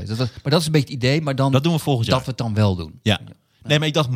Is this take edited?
no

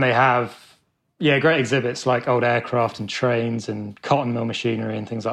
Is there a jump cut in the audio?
no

